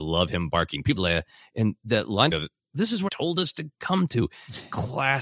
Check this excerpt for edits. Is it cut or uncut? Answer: cut